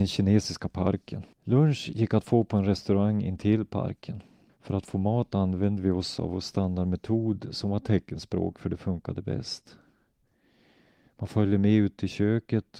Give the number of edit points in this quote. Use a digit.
2